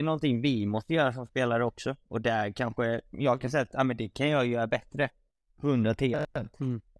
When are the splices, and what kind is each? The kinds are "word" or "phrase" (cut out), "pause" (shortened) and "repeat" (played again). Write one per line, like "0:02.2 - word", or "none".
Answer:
none